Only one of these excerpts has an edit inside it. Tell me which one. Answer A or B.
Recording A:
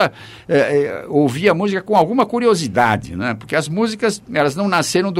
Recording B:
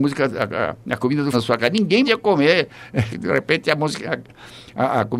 B